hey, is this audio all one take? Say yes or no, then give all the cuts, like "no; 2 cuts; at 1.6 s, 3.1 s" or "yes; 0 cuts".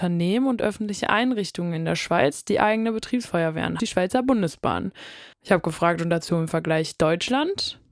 no; 2 cuts; at 3.8 s, 5.3 s